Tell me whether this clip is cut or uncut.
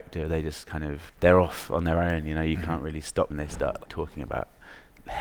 cut